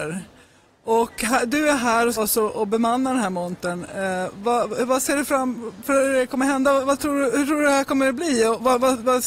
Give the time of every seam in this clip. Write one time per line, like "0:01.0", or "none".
0:02.2